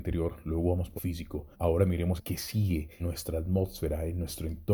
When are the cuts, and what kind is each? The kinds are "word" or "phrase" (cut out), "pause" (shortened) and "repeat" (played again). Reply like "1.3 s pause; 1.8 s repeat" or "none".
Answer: 1.0 s word; 1.5 s pause; 2.2 s word; 3.0 s word